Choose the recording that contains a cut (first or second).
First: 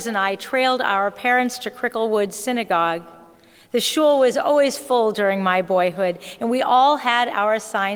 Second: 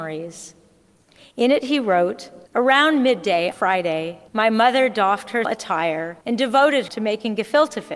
second